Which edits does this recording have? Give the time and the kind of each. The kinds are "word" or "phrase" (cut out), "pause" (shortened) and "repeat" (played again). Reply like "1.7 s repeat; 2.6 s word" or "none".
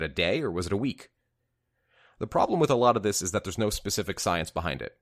none